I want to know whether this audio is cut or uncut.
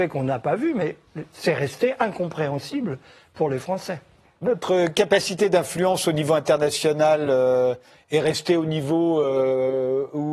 uncut